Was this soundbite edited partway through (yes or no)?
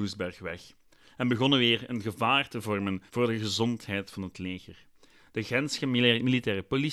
yes